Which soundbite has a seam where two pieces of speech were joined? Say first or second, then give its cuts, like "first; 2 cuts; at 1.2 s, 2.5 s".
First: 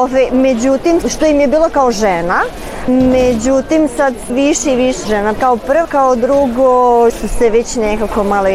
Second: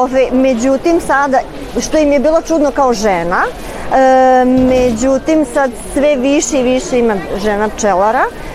first; 8 cuts; at 1.0 s, 1.7 s, 2.9 s, 4.3 s, 5.0 s, 5.4 s, 5.8 s, 7.1 s